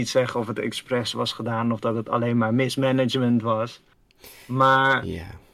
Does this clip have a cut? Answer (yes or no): no